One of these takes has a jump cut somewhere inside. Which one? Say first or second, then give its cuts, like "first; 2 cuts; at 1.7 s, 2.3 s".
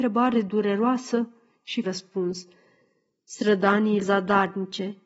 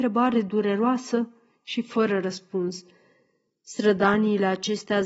first; 2 cuts; at 1.8 s, 4.0 s